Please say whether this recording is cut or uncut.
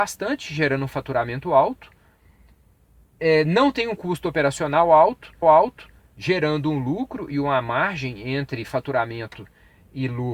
cut